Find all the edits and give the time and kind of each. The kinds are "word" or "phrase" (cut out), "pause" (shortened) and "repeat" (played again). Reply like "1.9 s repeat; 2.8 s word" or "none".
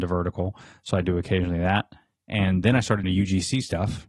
2.6 s word; 3.0 s word